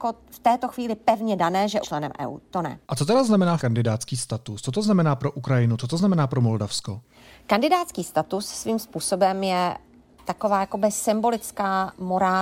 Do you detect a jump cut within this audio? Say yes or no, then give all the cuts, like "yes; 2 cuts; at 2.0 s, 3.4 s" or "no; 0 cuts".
yes; 3 cuts; at 1.8 s, 2.8 s, 3.6 s